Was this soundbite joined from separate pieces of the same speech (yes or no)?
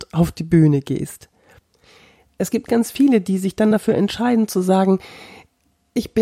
no